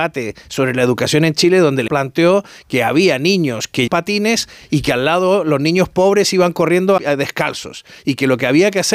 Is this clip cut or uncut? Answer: cut